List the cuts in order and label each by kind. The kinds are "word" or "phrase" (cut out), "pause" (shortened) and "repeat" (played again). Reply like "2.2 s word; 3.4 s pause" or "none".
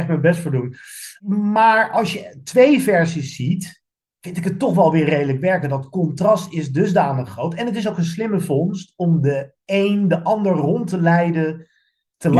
none